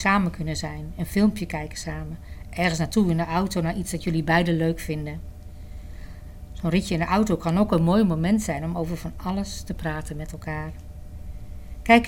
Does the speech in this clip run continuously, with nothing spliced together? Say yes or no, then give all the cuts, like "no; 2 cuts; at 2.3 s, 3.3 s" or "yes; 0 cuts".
yes; 0 cuts